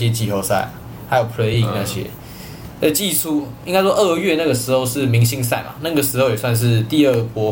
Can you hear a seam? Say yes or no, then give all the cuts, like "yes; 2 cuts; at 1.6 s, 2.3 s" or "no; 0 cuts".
no; 0 cuts